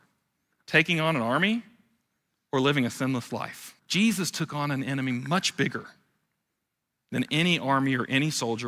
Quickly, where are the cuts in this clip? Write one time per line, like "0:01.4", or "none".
0:03.8

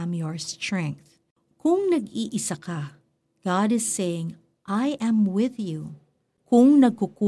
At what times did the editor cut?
none

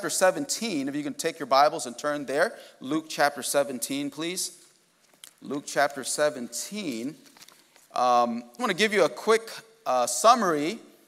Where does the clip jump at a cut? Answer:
0:05.3
0:08.6

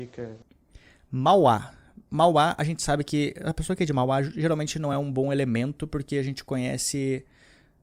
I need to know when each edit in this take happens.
none

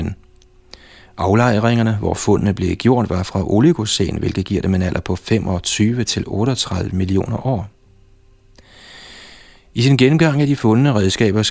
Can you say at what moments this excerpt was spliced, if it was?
none

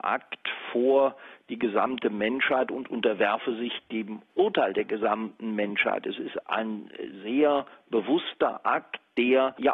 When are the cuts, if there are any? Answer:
0:06.4

